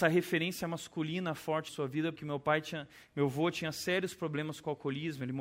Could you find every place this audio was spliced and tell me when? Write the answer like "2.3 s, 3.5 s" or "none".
1.7 s, 2.2 s